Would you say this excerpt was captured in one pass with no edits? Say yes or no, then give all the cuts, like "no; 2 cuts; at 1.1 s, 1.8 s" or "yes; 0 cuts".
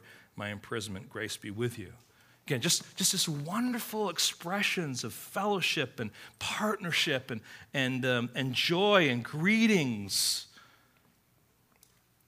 yes; 0 cuts